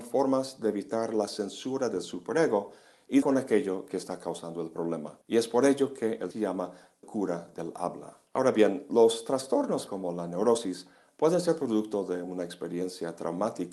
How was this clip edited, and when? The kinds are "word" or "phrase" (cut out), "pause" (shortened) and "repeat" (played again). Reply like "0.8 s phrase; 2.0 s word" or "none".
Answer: 3.2 s word; 5.2 s pause; 6.3 s word; 7.0 s word; 8.3 s pause; 9.9 s word